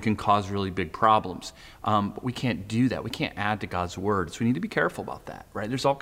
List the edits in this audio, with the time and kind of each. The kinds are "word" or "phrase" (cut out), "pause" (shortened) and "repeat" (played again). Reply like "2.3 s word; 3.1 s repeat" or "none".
none